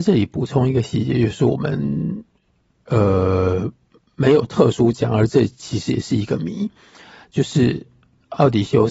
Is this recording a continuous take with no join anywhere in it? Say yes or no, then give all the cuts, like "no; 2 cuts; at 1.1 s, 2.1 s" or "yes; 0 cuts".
yes; 0 cuts